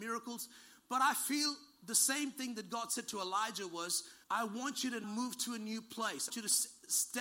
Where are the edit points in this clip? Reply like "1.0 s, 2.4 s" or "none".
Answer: 4.2 s, 5.0 s, 6.3 s